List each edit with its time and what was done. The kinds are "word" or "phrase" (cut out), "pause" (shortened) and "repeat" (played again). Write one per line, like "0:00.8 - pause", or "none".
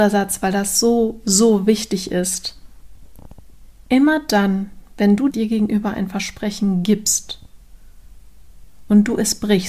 0:05.3 - phrase